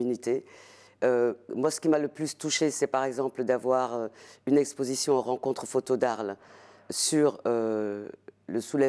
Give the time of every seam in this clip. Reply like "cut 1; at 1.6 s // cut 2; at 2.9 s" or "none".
none